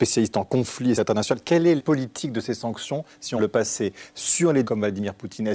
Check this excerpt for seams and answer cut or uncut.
cut